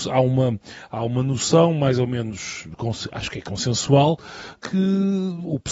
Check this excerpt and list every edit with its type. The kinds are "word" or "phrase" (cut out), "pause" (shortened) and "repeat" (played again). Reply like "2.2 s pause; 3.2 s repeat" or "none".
4.6 s word